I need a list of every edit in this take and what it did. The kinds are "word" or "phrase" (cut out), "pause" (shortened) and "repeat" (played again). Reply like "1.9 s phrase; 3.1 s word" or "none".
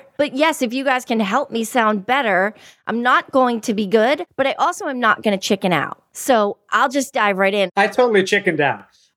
none